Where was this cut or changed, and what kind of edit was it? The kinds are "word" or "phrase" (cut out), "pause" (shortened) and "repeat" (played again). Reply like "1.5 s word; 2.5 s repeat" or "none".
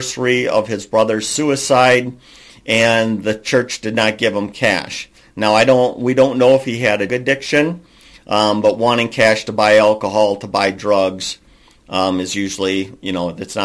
7.1 s word